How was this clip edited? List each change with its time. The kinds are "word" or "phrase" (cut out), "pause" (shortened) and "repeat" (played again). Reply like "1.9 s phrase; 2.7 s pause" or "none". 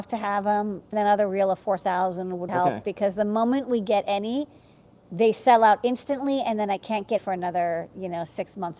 0.9 s word; 2.5 s word; 7.2 s word